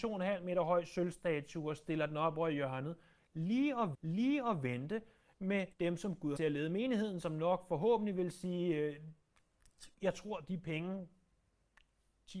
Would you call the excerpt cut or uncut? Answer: cut